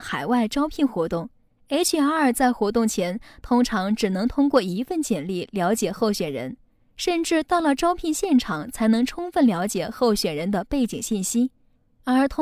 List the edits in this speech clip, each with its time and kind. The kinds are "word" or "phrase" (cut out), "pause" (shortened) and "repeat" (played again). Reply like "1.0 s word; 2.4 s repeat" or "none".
none